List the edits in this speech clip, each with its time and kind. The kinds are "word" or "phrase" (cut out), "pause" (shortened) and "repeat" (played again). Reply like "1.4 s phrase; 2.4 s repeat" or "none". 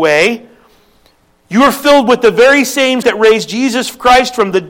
3.0 s word